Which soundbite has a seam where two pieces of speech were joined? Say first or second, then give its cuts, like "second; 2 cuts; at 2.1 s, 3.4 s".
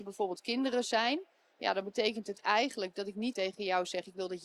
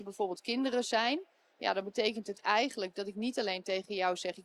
first; 1 cut; at 3.3 s